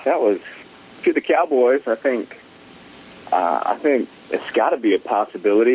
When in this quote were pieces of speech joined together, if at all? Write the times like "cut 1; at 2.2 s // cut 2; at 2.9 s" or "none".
none